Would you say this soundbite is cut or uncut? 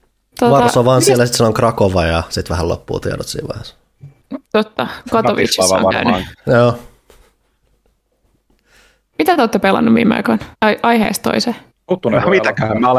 cut